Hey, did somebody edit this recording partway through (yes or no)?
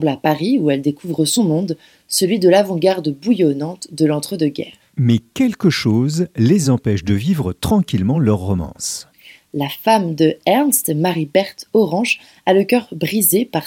no